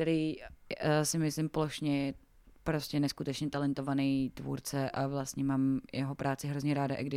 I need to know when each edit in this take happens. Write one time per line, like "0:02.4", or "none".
none